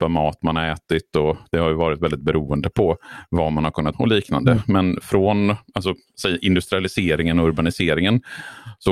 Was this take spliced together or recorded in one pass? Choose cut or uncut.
cut